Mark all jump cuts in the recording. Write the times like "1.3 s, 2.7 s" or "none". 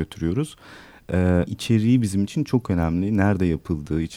1.5 s